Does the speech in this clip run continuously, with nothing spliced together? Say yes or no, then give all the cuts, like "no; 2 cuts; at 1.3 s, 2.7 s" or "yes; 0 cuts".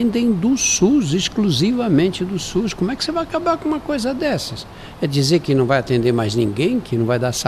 yes; 0 cuts